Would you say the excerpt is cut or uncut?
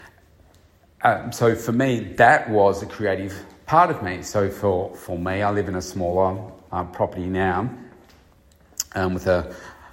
uncut